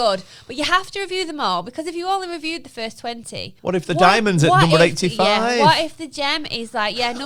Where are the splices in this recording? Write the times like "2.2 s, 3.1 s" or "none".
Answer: 3.6 s

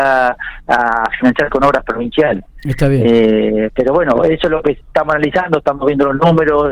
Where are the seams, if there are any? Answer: none

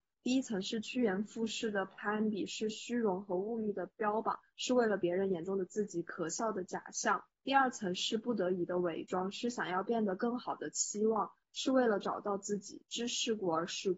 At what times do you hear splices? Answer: 7.3 s

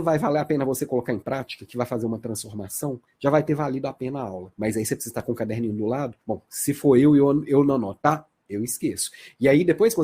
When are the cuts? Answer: 3.1 s, 6.2 s

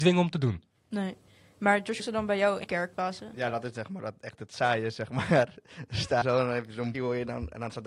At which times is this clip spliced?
2.0 s, 2.6 s, 2.9 s, 6.2 s, 6.9 s

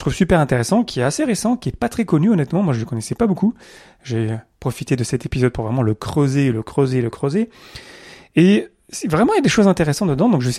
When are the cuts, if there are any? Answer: none

